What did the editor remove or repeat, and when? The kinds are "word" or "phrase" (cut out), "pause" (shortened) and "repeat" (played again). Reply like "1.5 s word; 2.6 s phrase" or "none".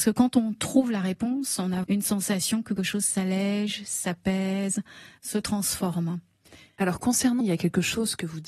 1.8 s word; 2.8 s word; 7.4 s word